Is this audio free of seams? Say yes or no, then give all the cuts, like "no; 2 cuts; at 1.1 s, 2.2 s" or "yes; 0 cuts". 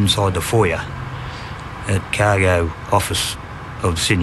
no; 1 cut; at 2.1 s